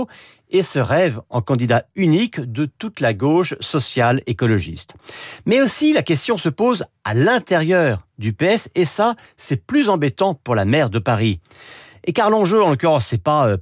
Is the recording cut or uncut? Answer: uncut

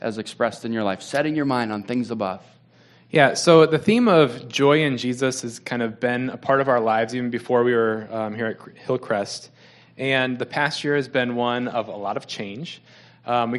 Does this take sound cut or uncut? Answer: uncut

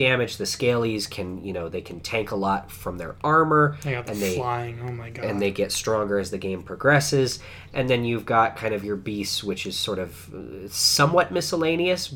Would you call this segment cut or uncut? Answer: uncut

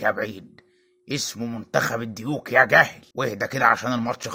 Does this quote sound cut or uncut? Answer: cut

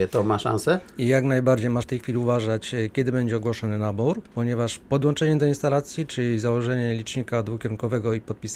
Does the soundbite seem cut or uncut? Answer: cut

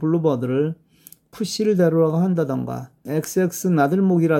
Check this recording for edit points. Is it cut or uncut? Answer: cut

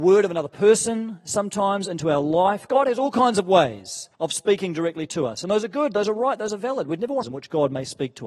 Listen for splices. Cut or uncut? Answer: cut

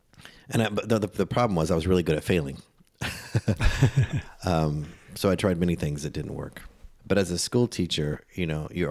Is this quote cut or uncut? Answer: cut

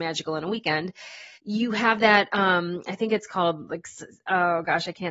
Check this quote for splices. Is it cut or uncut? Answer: cut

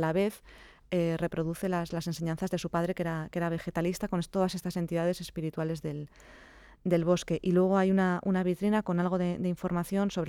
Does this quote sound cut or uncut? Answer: uncut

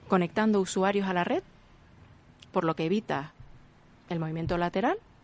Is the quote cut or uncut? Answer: uncut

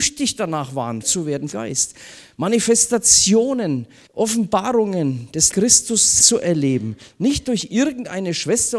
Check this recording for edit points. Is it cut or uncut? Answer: cut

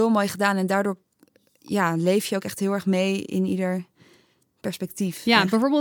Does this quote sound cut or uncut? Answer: uncut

